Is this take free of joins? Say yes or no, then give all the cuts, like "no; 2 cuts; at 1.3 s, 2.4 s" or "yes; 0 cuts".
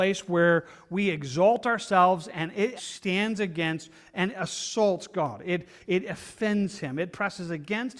no; 1 cut; at 2.8 s